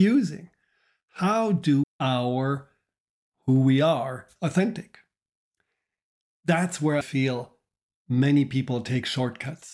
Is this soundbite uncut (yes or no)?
no